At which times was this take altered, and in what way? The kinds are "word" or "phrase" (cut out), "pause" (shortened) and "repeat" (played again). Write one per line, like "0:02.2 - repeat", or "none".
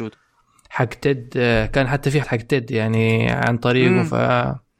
0:02.2 - word